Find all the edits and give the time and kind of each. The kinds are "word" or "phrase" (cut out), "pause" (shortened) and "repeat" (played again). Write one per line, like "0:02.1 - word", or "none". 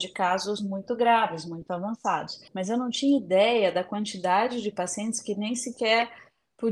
0:02.5 - pause